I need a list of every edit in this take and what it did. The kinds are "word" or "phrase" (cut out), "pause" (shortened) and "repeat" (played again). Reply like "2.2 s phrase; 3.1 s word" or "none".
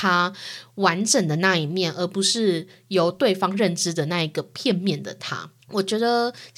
5.6 s pause